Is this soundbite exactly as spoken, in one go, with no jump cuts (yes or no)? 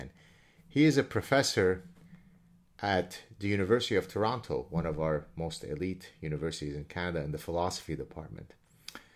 yes